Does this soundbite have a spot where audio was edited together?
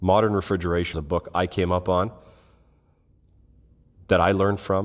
yes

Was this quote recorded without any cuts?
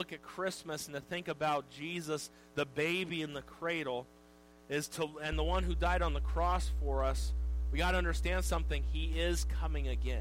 yes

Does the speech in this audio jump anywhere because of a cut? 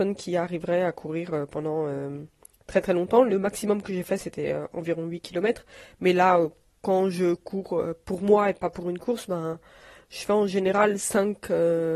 no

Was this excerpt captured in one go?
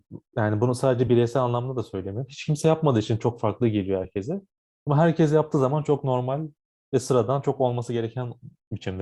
yes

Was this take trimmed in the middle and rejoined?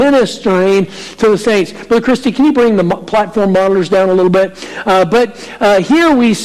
no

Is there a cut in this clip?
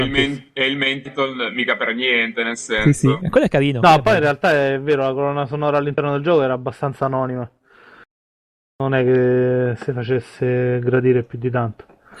no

